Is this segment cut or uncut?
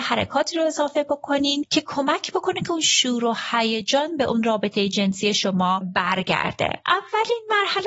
uncut